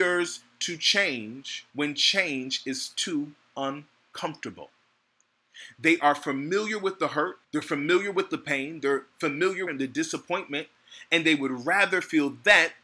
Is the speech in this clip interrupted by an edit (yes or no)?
yes